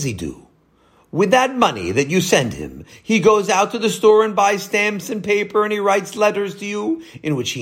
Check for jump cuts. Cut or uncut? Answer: uncut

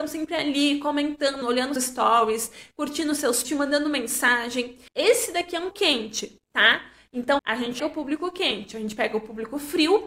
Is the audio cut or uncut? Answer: cut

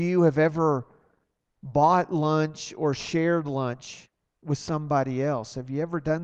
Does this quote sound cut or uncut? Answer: uncut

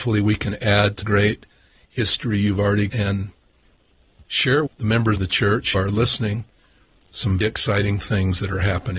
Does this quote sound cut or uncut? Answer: cut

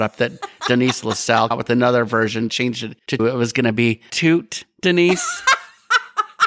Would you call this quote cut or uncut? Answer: cut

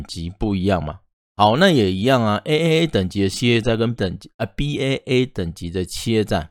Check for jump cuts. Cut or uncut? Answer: cut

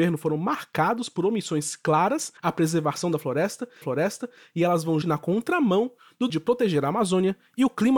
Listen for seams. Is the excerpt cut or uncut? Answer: cut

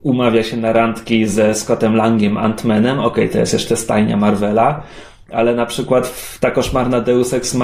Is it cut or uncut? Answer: uncut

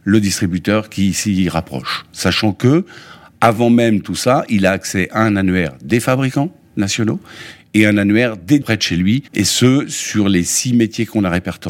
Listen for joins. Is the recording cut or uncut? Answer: cut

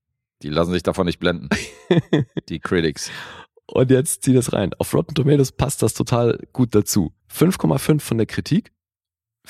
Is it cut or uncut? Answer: cut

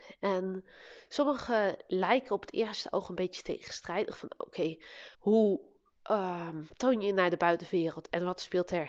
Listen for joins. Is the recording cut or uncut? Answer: cut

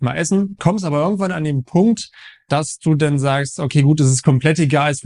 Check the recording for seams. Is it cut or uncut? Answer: uncut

